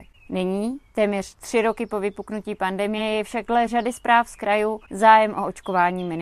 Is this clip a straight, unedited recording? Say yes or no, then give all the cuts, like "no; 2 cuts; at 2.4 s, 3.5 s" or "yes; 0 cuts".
yes; 0 cuts